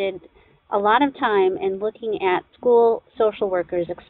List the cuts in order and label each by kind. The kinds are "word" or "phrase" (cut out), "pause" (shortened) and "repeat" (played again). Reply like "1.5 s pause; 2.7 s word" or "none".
2.5 s pause